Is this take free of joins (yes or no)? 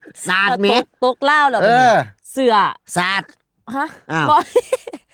no